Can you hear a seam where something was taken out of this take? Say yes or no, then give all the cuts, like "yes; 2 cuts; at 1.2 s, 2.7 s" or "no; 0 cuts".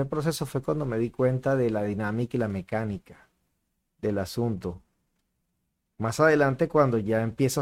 no; 0 cuts